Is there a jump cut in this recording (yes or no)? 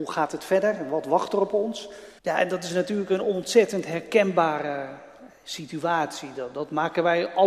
yes